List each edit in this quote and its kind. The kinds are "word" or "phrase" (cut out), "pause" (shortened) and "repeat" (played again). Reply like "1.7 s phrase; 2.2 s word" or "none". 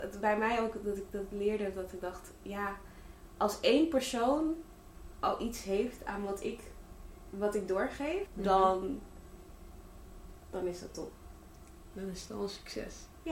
8.3 s word